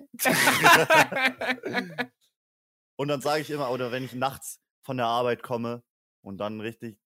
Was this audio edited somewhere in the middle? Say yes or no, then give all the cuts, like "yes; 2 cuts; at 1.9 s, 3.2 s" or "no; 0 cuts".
no; 0 cuts